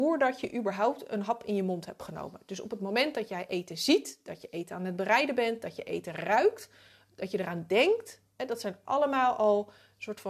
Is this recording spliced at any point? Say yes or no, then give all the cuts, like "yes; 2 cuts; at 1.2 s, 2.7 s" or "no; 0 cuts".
no; 0 cuts